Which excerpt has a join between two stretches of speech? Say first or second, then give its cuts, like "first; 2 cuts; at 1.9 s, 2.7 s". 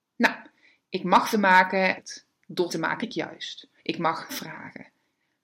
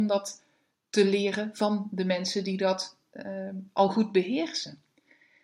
first; 6 cuts; at 1.3 s, 2.0 s, 2.7 s, 3.0 s, 3.8 s, 4.3 s